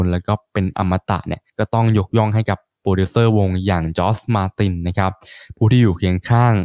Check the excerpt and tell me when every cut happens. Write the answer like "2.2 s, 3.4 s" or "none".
1.5 s

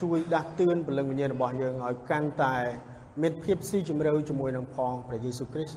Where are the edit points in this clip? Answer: none

